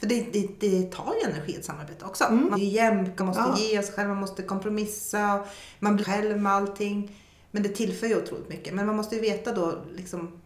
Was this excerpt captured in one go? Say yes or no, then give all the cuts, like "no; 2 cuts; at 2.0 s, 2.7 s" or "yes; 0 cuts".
no; 3 cuts; at 2.5 s, 3.2 s, 6.0 s